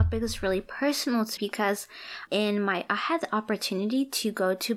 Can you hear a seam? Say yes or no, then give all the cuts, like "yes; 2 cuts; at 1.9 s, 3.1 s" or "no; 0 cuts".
yes; 3 cuts; at 1.4 s, 2.3 s, 2.9 s